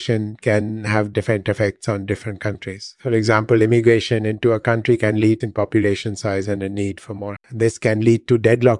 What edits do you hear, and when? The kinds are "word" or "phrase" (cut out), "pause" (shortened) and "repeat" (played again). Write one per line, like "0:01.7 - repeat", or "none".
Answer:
0:01.1 - word
0:05.4 - phrase
0:07.4 - word